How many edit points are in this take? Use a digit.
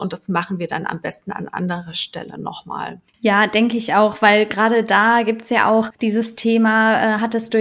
2